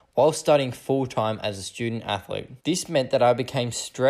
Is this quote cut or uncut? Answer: cut